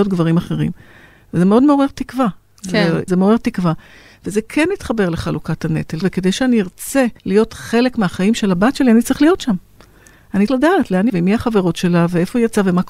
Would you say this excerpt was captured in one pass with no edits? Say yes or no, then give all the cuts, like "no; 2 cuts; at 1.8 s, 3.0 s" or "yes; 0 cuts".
no; 5 cuts; at 3.1 s, 6.0 s, 7.2 s, 10.5 s, 11.1 s